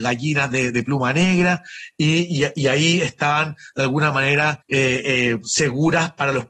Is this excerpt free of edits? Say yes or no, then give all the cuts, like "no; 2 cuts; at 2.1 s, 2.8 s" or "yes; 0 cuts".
no; 1 cut; at 4.6 s